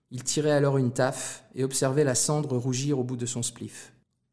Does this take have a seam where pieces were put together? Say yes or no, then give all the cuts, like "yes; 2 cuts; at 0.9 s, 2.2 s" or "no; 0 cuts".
no; 0 cuts